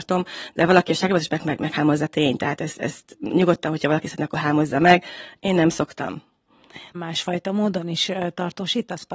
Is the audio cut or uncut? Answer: cut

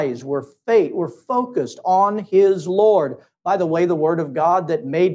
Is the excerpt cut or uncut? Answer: uncut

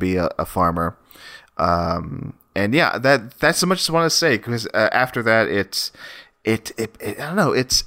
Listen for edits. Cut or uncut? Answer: uncut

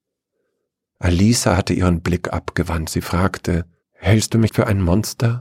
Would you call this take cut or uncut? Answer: cut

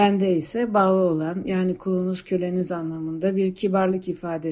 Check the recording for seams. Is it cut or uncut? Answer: uncut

